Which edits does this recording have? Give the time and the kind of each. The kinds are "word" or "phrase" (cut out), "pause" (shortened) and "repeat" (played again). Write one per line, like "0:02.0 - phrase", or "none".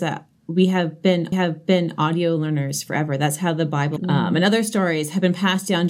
0:01.3 - repeat
0:04.0 - word